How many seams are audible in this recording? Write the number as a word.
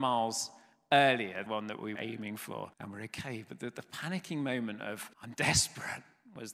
four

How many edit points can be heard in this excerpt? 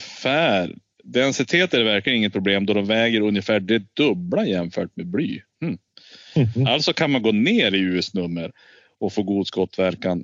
zero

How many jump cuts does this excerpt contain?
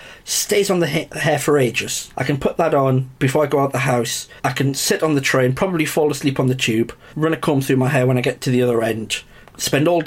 two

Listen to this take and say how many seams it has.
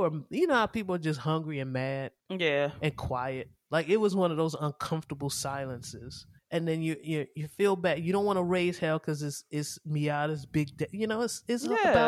two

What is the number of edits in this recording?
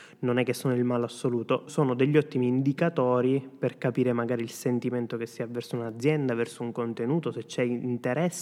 one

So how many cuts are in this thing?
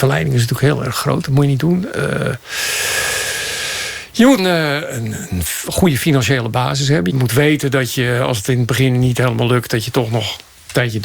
two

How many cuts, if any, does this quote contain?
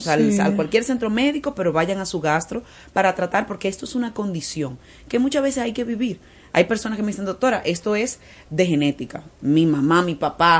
zero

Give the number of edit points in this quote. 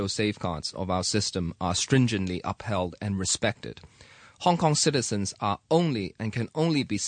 zero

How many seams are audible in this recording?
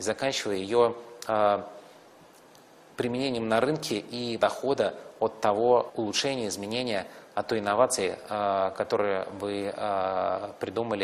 two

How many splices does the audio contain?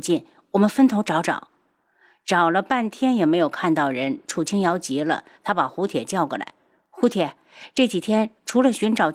zero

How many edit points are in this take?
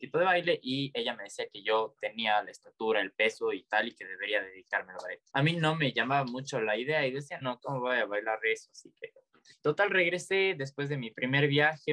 three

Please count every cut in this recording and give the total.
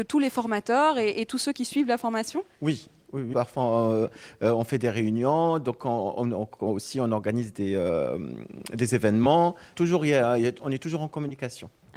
two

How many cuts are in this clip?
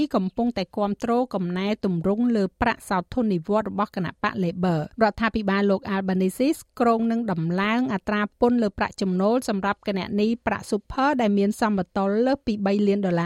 one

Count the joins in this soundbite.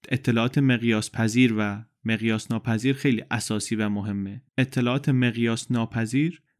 one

